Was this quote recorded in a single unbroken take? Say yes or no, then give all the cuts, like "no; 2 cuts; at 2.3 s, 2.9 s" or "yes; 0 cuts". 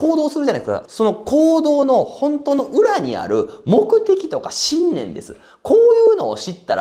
yes; 0 cuts